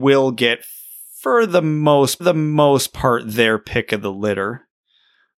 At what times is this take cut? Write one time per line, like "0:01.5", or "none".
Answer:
0:02.2